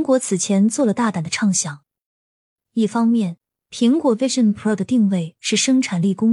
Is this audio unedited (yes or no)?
yes